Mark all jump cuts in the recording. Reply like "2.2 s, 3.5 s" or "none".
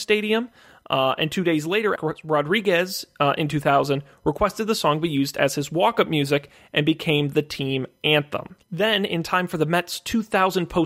2.0 s, 8.6 s